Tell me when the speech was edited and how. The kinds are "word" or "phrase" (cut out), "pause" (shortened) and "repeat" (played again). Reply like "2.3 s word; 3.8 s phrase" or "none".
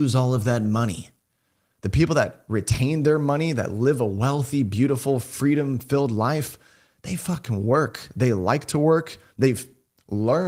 none